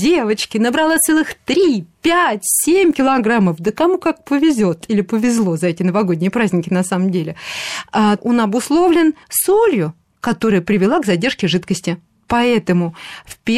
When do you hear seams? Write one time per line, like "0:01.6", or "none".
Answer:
0:08.2
0:09.2